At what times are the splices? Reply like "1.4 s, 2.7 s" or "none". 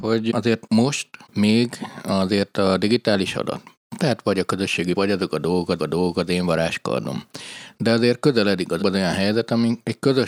3.3 s, 4.9 s, 5.8 s, 8.8 s